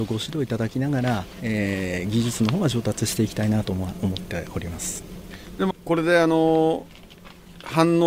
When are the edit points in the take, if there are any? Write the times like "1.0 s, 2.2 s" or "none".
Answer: 5.7 s